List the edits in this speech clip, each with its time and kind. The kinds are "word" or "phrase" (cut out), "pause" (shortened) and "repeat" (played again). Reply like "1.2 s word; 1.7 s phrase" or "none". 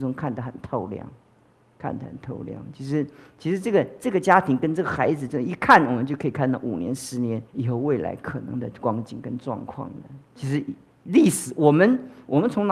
7.5 s pause